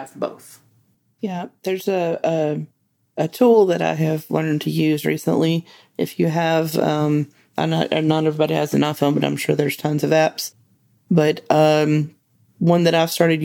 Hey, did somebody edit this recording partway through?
no; 0 cuts

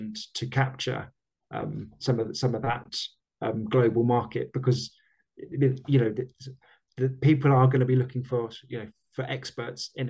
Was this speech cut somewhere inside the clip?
yes; 1 cut; at 5.5 s

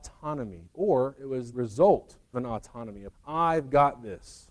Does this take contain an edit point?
yes; 3 cuts; at 1.5 s, 2.3 s, 3.1 s

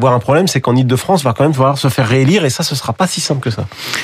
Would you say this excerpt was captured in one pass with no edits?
yes; 0 cuts

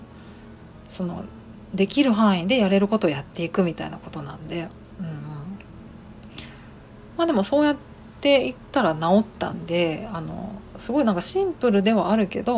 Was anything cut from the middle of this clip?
no; 0 cuts

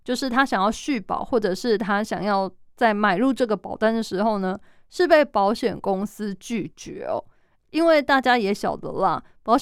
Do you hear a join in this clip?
no; 0 cuts

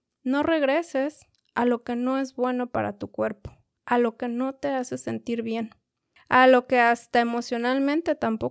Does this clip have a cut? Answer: no; 0 cuts

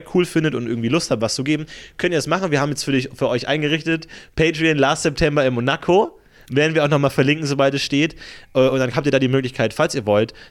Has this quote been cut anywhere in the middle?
no; 0 cuts

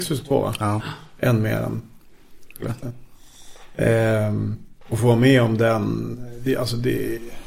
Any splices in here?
no; 0 cuts

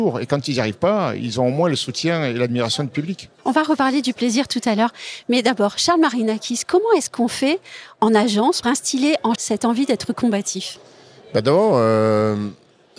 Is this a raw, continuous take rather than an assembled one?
no; 3 cuts; at 3.4 s, 8.6 s, 9.3 s

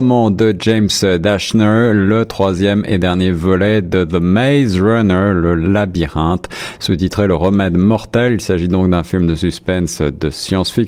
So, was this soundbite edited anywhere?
no; 0 cuts

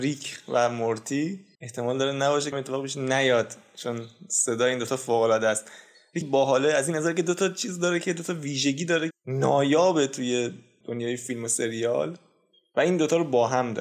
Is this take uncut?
no; 5 cuts; at 1.5 s, 2.5 s, 6.2 s, 9.1 s, 10.8 s

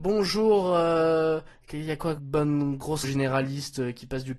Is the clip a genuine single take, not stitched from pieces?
no; 2 cuts; at 2.2 s, 3.0 s

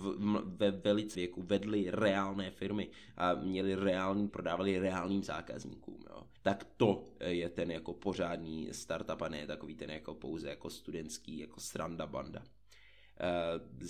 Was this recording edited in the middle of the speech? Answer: yes; 3 cuts; at 1.1 s, 4.3 s, 6.4 s

